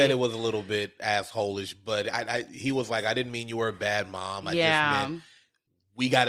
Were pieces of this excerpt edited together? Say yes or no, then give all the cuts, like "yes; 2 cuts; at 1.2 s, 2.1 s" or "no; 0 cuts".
no; 0 cuts